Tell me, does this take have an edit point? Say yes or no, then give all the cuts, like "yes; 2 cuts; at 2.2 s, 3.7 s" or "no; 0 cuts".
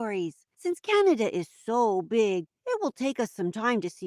no; 0 cuts